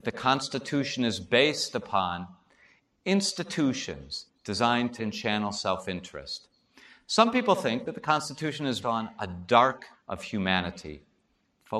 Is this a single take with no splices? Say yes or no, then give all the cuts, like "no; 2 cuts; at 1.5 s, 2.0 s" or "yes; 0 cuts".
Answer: no; 3 cuts; at 5.0 s, 8.8 s, 9.9 s